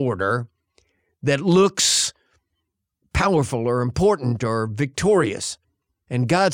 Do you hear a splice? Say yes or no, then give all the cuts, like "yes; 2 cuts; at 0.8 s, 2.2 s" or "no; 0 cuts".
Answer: no; 0 cuts